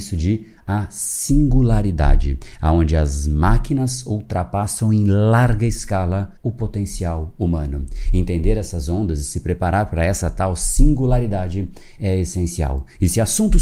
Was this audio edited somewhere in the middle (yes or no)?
yes